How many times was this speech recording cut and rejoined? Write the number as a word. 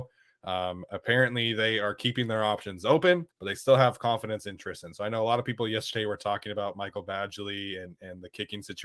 one